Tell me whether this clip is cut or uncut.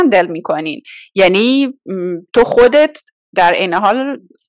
uncut